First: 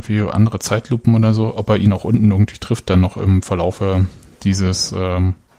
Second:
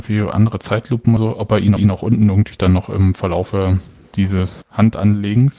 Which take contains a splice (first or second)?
second